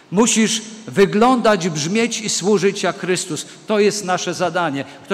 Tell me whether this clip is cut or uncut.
uncut